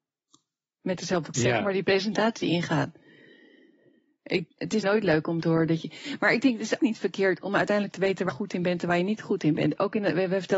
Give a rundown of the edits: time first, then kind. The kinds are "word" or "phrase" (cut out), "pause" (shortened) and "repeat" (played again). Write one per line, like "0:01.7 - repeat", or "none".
0:01.3 - word
0:04.8 - word
0:06.8 - word
0:08.3 - word